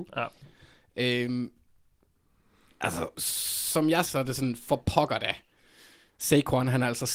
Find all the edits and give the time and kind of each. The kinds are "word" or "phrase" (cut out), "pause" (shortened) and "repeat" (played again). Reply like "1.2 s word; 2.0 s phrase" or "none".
3.1 s word; 4.0 s word

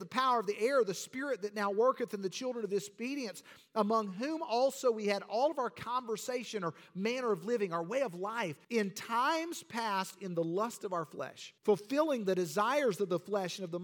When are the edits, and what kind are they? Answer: 8.6 s pause; 11.6 s pause

